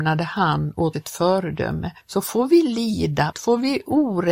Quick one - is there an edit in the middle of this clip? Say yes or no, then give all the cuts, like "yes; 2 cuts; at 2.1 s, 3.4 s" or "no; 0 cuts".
yes; 3 cuts; at 0.9 s, 2.0 s, 3.3 s